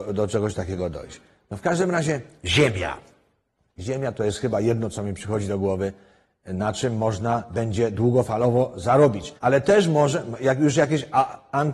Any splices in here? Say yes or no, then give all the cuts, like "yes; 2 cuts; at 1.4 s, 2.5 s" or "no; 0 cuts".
yes; 1 cut; at 9.4 s